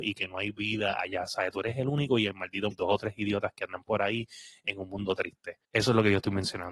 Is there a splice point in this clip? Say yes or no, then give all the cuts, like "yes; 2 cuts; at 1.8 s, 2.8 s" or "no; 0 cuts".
yes; 2 cuts; at 2.7 s, 5.6 s